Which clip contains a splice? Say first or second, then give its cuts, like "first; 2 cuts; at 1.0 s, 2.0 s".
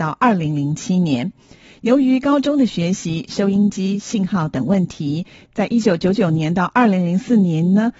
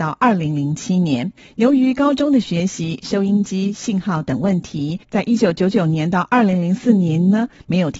second; 2 cuts; at 1.4 s, 5.0 s